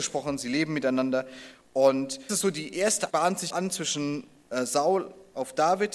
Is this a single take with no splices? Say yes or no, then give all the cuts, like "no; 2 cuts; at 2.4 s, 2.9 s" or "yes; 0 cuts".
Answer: no; 3 cuts; at 2.3 s, 3.1 s, 3.5 s